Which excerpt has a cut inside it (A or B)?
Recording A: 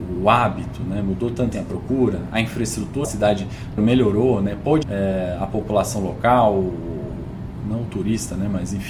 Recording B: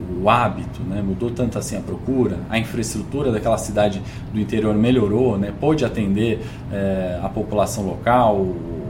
A